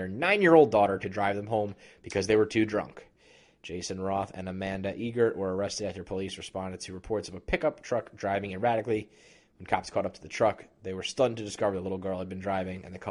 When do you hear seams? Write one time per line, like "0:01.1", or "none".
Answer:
none